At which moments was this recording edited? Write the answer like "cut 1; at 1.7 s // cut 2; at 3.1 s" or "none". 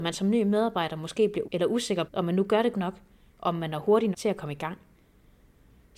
cut 1; at 1.4 s // cut 2; at 2.1 s // cut 3; at 2.7 s // cut 4; at 4.1 s